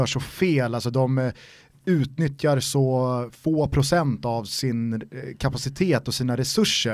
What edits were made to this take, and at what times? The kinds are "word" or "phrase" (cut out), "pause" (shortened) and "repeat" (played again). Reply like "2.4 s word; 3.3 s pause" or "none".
none